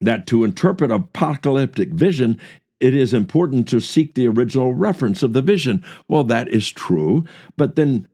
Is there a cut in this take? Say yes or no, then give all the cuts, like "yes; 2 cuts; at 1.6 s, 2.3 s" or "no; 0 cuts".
no; 0 cuts